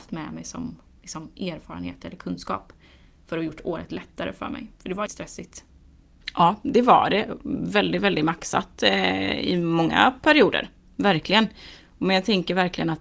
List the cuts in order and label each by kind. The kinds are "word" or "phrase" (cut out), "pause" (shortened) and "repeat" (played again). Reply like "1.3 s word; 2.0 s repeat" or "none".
5.1 s word